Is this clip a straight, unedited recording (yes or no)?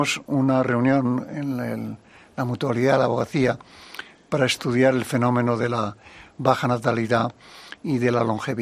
yes